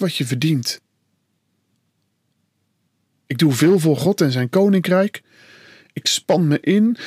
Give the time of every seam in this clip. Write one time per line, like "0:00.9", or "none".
none